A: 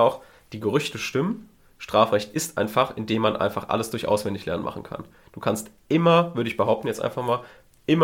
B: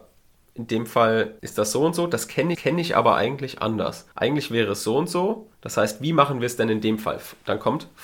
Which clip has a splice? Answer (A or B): B